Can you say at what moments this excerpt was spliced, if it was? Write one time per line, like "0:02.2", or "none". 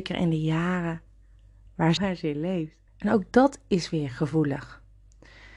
0:02.0
0:02.9